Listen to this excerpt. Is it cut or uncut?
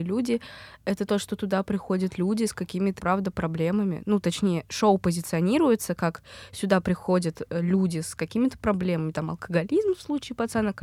cut